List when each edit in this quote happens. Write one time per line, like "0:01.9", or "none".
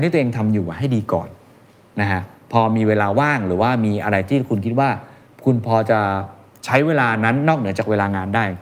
none